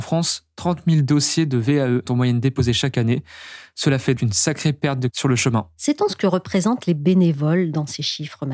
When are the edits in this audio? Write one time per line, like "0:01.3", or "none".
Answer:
0:02.1
0:04.2
0:05.1